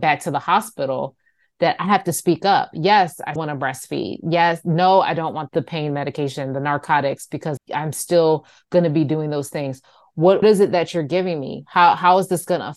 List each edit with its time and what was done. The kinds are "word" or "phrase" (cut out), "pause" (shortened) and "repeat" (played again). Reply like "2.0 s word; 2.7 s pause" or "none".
3.4 s word; 5.5 s word; 7.6 s word; 10.4 s word